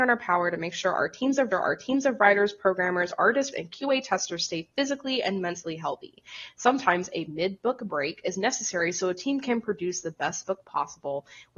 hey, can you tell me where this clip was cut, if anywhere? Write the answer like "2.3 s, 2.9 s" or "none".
1.5 s, 3.5 s